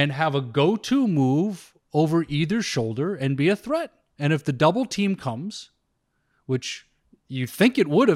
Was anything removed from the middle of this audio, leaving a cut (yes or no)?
no